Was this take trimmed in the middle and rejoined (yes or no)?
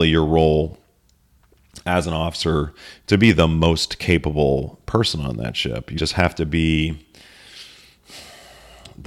yes